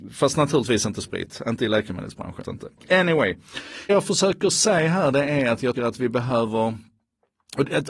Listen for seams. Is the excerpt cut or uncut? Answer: cut